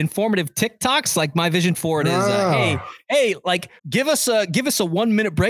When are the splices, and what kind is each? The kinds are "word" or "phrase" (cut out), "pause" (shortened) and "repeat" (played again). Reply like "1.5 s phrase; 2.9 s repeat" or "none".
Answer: 3.8 s pause